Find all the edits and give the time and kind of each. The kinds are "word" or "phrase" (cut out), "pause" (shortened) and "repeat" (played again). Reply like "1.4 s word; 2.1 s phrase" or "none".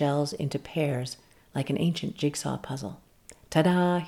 none